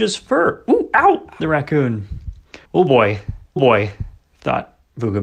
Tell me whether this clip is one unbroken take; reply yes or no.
no